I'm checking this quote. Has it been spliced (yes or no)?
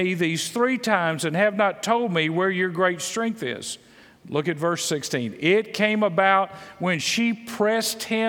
no